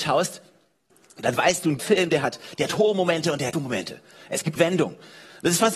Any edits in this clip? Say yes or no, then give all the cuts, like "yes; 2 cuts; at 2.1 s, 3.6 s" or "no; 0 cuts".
yes; 3 cuts; at 1.8 s, 3.5 s, 4.6 s